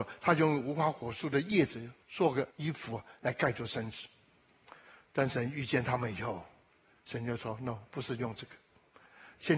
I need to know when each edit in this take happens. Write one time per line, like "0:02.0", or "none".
0:02.0
0:02.5